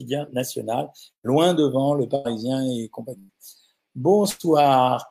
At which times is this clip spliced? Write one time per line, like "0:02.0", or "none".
none

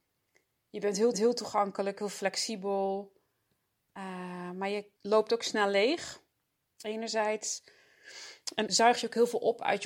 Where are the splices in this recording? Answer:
0:01.1
0:05.0
0:08.7

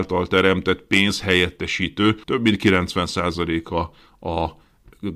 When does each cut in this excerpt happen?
0:02.2

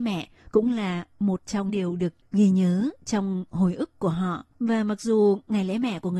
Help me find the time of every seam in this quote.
0:01.7
0:04.5

